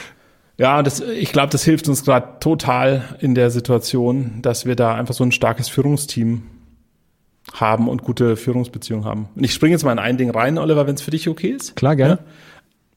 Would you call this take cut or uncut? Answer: uncut